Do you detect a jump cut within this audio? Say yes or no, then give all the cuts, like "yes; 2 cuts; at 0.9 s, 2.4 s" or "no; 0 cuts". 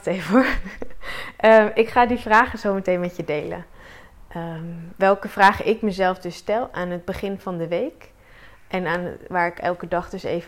no; 0 cuts